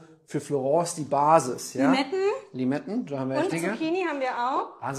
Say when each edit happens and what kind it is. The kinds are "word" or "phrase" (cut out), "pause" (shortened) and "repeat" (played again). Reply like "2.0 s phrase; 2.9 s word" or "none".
3.5 s word